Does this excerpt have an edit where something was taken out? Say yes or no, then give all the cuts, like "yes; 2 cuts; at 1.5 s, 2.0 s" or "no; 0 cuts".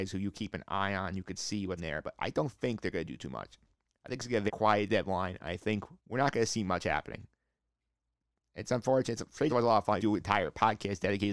yes; 5 cuts; at 1.8 s, 4.5 s, 6.0 s, 9.5 s, 10.0 s